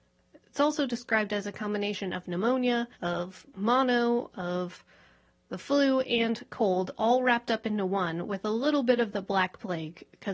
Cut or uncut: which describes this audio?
cut